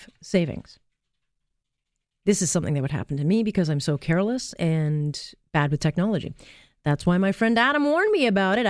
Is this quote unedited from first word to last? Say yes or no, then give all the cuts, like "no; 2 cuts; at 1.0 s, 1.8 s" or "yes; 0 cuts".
yes; 0 cuts